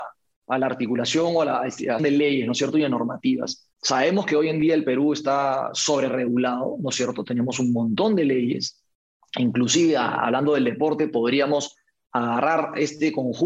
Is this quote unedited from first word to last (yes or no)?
no